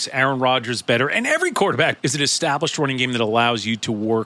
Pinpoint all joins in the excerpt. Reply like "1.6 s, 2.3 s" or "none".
2.0 s